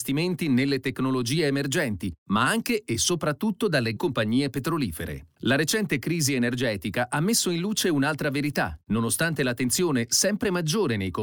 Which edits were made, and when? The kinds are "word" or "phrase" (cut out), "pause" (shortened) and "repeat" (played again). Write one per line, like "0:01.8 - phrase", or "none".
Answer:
0:04.0 - word